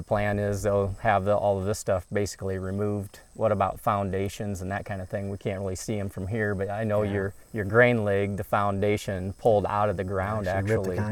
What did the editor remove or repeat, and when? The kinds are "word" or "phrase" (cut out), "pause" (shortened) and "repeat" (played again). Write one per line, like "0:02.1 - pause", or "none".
0:07.4 - pause